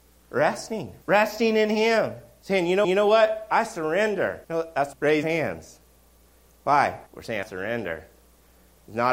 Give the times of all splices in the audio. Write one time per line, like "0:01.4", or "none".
0:01.0
0:02.8
0:04.4
0:04.9
0:05.2
0:07.1
0:07.4